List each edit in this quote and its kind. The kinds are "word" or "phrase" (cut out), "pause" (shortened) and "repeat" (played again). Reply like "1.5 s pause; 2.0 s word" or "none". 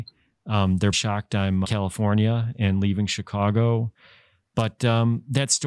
0.9 s word; 1.6 s phrase

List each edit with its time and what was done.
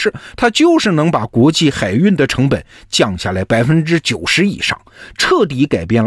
none

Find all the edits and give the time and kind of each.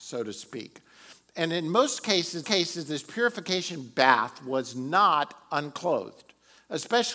2.4 s repeat

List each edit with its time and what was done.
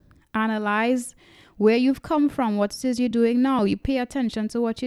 none

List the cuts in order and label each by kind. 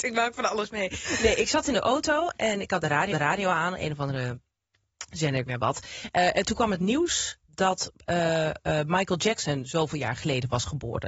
3.1 s repeat; 5.5 s phrase; 7.5 s word

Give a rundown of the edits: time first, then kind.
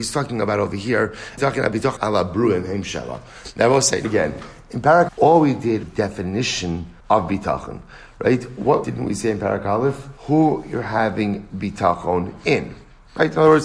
1.4 s phrase; 2.0 s word; 4.0 s word; 5.1 s word; 5.8 s phrase; 7.0 s pause; 8.8 s word; 10.2 s pause

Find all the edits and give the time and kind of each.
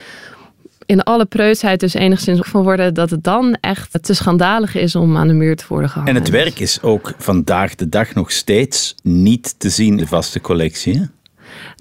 2.4 s word; 3.9 s word; 9.0 s pause; 10.0 s word

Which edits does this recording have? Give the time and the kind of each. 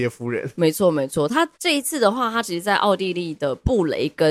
1.5 s pause

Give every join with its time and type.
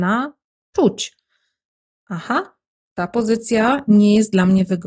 none

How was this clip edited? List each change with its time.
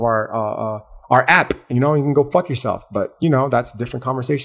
none

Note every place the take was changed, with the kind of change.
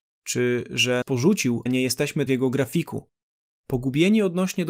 1.0 s word; 1.7 s phrase; 2.3 s phrase; 3.3 s pause

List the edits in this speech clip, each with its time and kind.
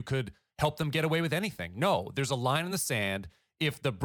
none

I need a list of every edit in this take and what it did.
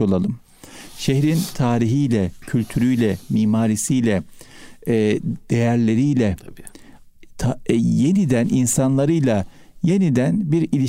none

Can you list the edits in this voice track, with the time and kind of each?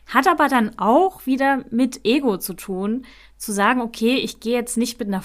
none

